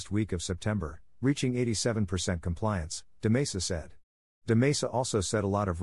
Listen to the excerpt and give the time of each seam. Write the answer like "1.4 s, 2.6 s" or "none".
none